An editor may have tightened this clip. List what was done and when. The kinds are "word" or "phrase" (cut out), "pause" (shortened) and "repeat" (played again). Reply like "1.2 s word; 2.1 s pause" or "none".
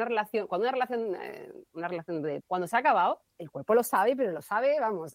2.4 s phrase